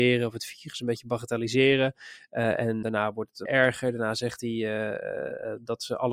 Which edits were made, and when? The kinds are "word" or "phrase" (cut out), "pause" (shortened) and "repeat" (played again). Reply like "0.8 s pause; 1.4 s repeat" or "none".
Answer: 2.8 s word; 3.5 s word